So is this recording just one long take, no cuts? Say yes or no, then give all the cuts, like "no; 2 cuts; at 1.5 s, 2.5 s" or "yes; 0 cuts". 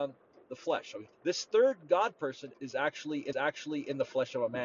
no; 3 cuts; at 1.1 s, 2.5 s, 3.3 s